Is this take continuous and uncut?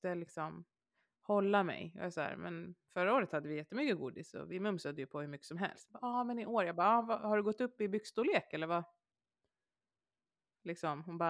yes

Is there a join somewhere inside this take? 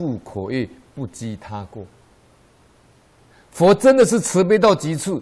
no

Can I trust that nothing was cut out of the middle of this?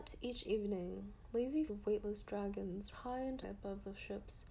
no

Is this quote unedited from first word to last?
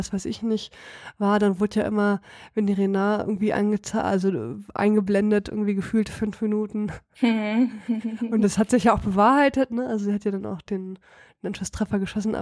yes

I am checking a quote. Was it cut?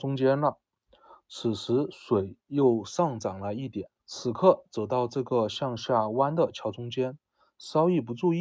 yes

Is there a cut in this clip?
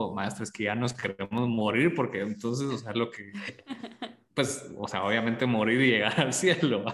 no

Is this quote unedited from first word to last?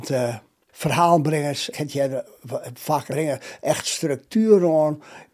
no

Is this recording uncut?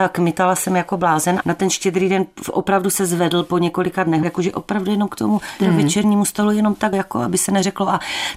no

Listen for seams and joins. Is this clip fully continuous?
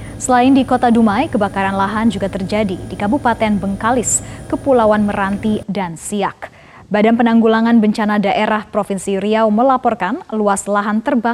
yes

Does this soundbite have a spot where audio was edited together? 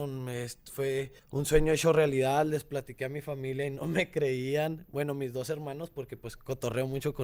yes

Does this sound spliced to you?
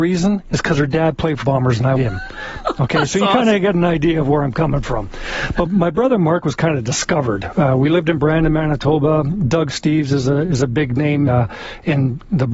yes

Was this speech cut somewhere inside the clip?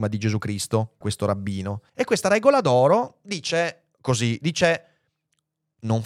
yes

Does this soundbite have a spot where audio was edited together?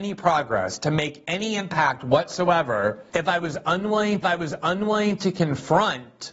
yes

